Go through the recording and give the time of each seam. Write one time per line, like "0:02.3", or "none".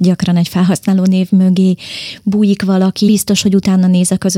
0:03.1